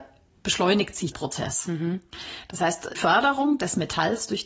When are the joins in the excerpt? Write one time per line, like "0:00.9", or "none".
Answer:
0:01.1
0:02.9